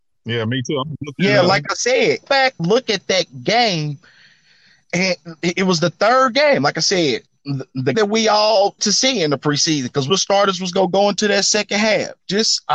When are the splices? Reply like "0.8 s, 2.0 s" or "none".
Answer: 2.2 s, 2.6 s, 7.9 s, 8.8 s, 10.1 s